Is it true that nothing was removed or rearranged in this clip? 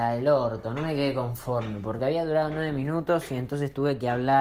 yes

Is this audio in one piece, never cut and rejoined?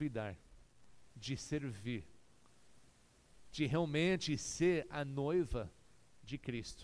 yes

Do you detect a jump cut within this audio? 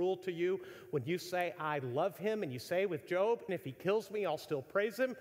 yes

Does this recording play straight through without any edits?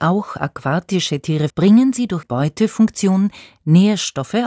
no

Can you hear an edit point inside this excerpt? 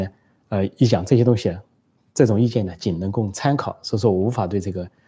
no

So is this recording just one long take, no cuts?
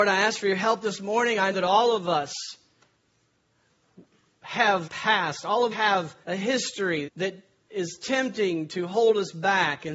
no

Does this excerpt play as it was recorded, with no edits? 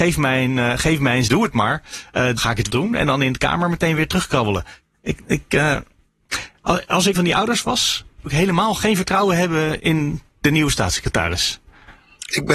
no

